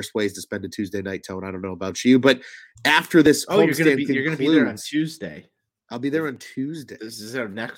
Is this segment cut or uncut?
uncut